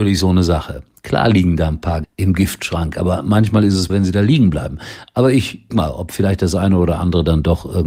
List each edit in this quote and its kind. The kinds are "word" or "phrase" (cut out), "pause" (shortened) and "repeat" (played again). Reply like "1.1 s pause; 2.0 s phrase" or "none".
2.0 s word; 3.9 s word; 5.7 s word